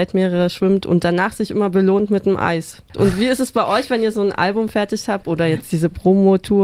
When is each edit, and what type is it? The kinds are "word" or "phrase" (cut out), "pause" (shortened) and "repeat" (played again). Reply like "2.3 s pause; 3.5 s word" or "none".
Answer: none